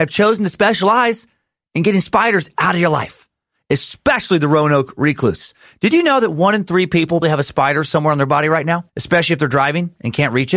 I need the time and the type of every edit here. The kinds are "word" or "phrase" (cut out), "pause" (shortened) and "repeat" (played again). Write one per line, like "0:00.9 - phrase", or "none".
0:07.2 - word
0:08.9 - pause